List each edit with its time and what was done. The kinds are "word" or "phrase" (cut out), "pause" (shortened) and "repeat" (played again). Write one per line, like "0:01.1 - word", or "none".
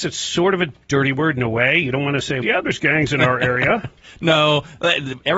0:02.4 - word